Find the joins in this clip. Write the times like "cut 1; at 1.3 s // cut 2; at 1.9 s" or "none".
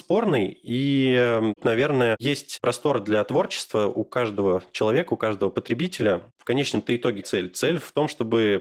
cut 1; at 7.2 s